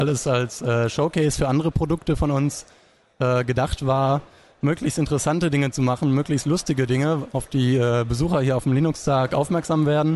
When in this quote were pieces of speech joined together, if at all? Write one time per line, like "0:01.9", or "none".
none